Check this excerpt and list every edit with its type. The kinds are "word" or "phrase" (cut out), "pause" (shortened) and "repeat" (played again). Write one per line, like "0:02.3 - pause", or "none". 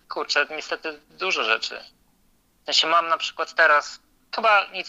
none